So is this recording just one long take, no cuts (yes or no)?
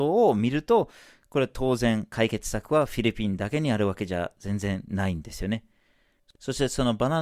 yes